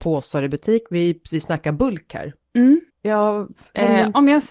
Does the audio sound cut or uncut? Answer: cut